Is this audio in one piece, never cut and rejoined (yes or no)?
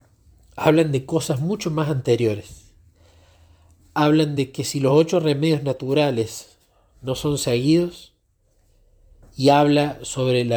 yes